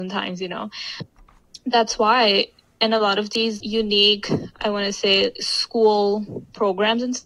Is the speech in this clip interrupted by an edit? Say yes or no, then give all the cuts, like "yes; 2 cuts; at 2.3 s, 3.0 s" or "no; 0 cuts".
yes; 1 cut; at 3.6 s